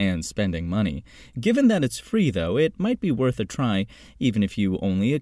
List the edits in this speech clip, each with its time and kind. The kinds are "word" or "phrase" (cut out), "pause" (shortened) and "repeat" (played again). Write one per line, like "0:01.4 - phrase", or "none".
none